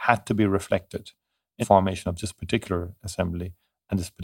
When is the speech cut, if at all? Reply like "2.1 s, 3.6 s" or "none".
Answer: 1.6 s